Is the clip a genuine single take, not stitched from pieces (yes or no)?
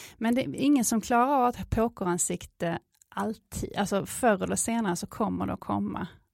yes